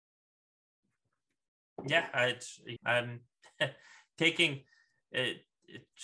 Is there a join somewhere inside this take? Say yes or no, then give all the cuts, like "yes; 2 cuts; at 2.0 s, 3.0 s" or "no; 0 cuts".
yes; 1 cut; at 2.8 s